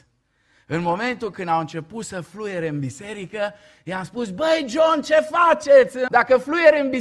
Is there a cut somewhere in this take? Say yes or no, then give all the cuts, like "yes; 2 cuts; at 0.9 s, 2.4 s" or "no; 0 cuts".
yes; 1 cut; at 6.1 s